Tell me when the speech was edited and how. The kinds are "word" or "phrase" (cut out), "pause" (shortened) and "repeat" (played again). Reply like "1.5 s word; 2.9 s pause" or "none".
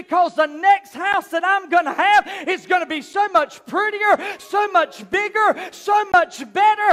none